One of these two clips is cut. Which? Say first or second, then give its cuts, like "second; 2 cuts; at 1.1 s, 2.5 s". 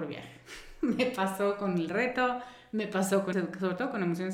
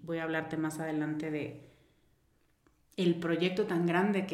first; 1 cut; at 3.3 s